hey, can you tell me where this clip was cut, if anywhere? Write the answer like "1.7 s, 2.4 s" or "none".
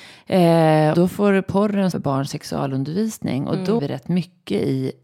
0.9 s, 1.9 s, 3.8 s

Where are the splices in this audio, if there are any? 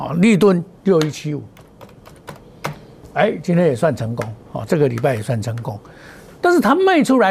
none

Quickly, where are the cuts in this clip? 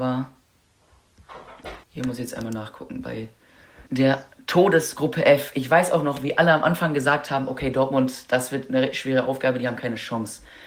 1.8 s, 3.9 s

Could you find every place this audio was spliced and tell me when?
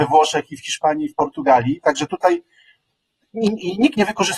none

